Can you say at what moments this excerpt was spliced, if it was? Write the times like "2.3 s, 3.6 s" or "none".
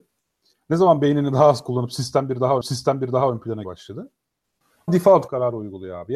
2.6 s, 3.6 s, 4.9 s